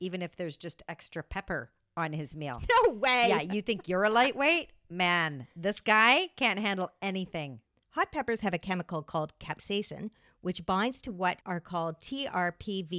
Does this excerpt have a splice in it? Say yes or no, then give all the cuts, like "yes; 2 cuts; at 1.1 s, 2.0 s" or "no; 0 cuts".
no; 0 cuts